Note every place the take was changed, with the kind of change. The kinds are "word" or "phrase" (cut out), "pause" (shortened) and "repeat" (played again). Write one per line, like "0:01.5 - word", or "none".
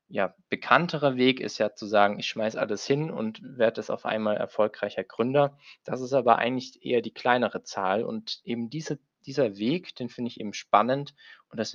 none